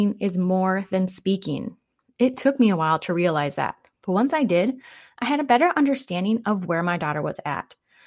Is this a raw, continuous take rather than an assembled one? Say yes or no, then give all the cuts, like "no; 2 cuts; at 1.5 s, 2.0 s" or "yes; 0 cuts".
yes; 0 cuts